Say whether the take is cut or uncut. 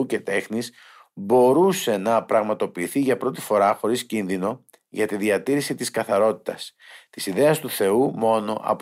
uncut